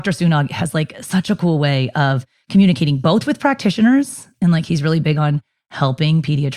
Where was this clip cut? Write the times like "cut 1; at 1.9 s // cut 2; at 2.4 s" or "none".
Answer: none